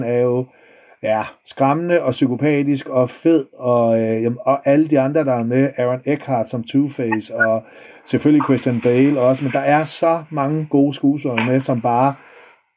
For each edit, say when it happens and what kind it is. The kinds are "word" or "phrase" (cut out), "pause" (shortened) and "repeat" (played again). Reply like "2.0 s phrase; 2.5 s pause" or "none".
none